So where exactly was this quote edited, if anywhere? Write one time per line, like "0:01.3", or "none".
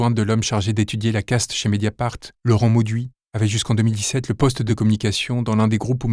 0:04.7